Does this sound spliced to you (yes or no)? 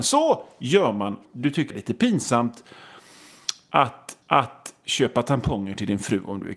yes